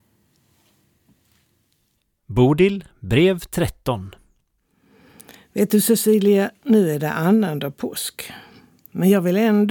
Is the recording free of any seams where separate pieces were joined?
yes; 0 cuts

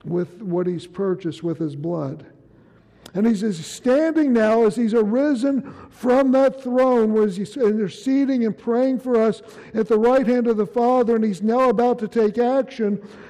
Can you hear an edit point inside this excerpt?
no; 0 cuts

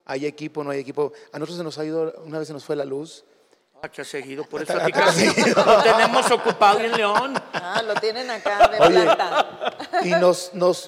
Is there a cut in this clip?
yes; 2 cuts; at 4.0 s, 6.8 s

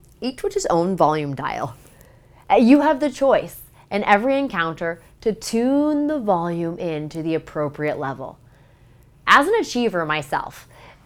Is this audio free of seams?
yes; 0 cuts

